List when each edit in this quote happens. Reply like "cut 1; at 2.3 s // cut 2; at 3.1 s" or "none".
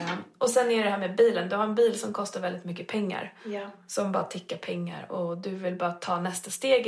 none